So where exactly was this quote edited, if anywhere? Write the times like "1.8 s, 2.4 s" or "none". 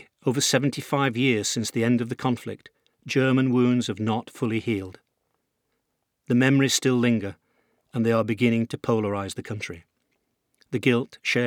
none